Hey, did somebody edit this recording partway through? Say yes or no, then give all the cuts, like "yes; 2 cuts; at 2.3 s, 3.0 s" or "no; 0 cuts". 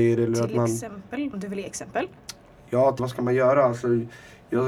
yes; 2 cuts; at 1.3 s, 3.0 s